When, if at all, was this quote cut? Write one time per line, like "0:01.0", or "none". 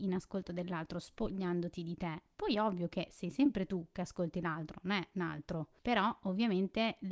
0:05.8